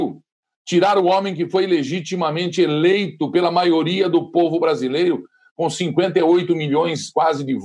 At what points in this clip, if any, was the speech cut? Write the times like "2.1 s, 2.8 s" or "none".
none